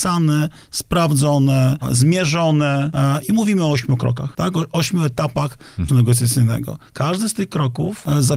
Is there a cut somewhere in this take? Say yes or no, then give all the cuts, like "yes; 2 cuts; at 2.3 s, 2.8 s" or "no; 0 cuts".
yes; 1 cut; at 5.9 s